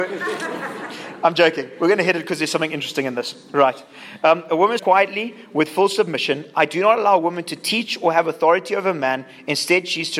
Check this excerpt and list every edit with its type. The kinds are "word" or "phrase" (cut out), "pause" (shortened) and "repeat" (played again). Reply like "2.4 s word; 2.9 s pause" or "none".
4.8 s phrase